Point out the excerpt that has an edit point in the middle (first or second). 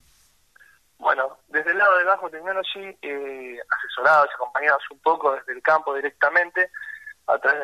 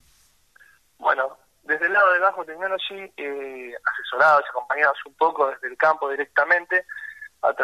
first